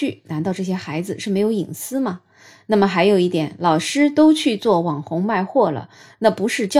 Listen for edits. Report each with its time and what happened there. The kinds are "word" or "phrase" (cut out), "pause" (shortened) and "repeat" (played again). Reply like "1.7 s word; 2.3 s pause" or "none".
none